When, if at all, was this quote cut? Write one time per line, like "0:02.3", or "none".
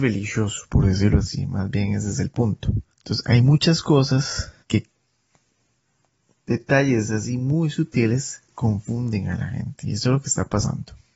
0:02.9
0:04.6
0:08.5